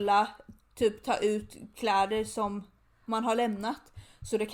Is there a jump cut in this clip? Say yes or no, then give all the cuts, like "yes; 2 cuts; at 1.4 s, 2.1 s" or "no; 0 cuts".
no; 0 cuts